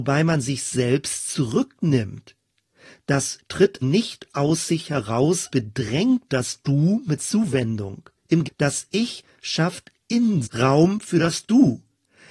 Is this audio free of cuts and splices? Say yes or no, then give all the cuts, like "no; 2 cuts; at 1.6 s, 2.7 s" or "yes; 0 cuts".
no; 6 cuts; at 3.4 s, 3.8 s, 5.5 s, 7.2 s, 8.4 s, 10.4 s